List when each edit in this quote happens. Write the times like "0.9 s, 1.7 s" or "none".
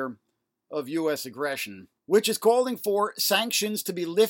2.0 s